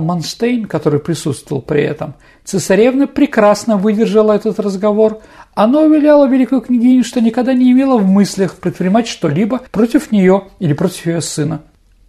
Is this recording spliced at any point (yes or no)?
yes